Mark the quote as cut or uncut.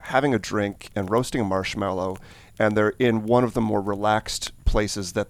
uncut